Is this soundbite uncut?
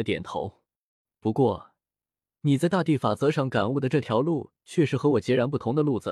yes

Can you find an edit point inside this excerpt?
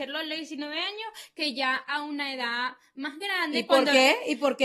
no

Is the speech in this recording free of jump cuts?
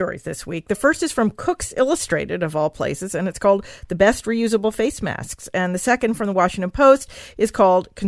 yes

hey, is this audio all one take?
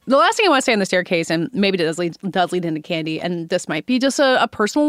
yes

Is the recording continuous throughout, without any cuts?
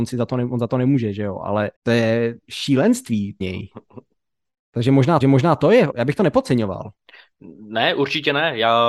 no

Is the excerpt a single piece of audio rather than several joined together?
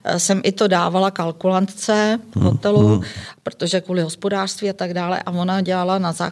yes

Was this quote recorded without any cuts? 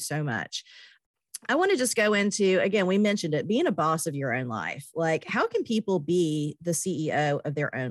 yes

